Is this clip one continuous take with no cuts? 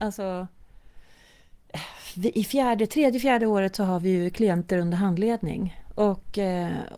yes; 0 cuts

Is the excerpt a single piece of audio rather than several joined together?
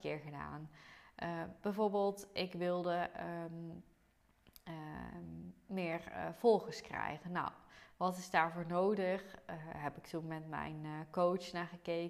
yes; 0 cuts

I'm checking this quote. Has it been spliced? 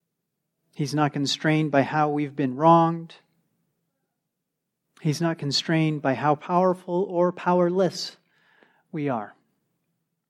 no; 0 cuts

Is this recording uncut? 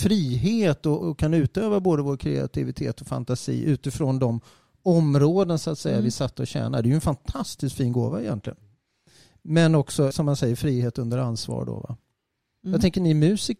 no; 2 cuts; at 1.0 s, 10.1 s

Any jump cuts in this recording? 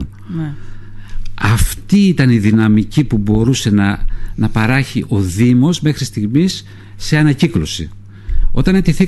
no; 0 cuts

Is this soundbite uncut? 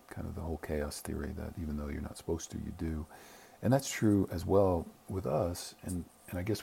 yes; 0 cuts

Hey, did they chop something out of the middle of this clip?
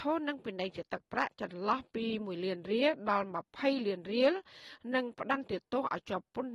no; 0 cuts

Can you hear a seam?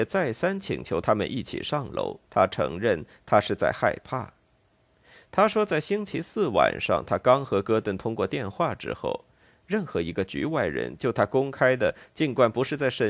yes; 1 cut; at 2.2 s

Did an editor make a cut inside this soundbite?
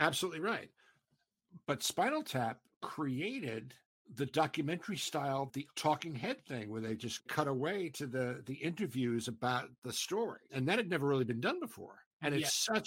no; 0 cuts

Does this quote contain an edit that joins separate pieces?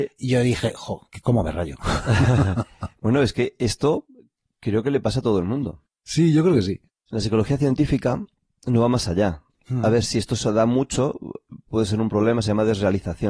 no; 0 cuts

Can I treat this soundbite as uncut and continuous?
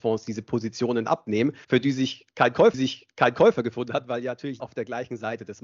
no; 3 cuts; at 1.6 s, 2.7 s, 4.6 s

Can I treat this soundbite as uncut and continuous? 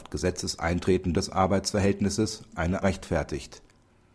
no; 3 cuts; at 1.1 s, 2.5 s, 2.8 s

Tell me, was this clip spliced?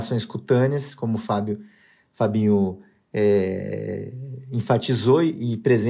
no; 0 cuts

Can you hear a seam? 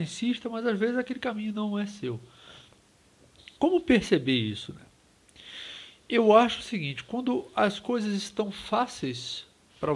no; 0 cuts

